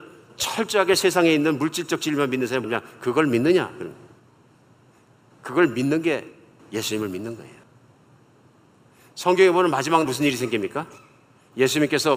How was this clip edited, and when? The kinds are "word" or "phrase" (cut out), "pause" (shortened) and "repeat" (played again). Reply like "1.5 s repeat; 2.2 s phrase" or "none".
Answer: 2.6 s word; 10.0 s word